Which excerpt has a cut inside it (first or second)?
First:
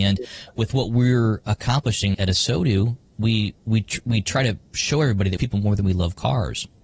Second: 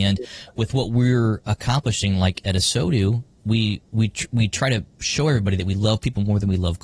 first